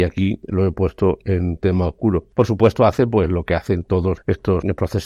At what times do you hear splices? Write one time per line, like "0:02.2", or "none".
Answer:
none